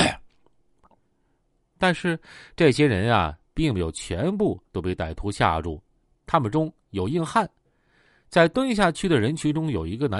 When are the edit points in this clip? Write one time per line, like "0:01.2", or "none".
0:04.7

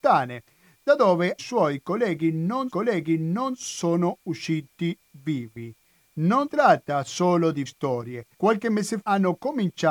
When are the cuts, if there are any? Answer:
0:01.4
0:02.7
0:06.5
0:07.7
0:08.3
0:09.0

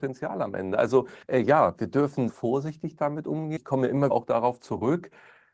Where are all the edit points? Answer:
0:01.2
0:02.3
0:03.6
0:04.1

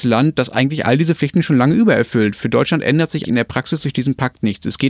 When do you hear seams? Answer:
0:03.2

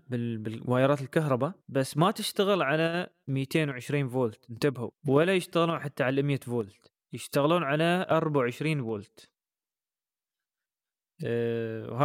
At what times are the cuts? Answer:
0:01.6
0:05.0
0:07.0

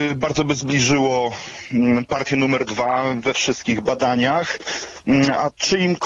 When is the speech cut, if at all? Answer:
none

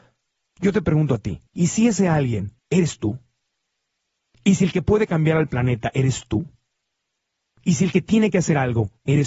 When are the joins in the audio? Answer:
0:01.5
0:02.6

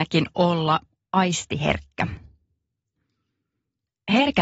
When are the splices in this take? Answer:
none

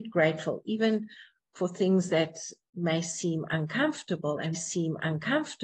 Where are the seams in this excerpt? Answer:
0:04.5

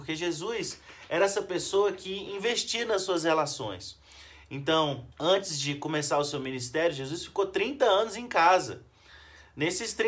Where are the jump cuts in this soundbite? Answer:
0:05.1

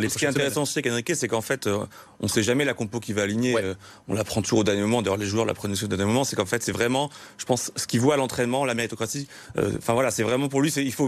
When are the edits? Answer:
none

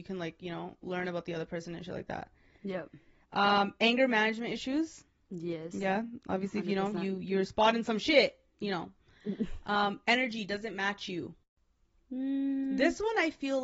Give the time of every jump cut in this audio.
none

